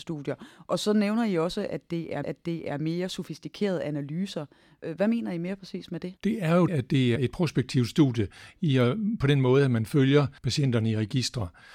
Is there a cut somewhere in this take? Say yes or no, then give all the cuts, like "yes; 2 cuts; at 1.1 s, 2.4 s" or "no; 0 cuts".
yes; 5 cuts; at 2.2 s, 6.2 s, 6.7 s, 7.2 s, 10.4 s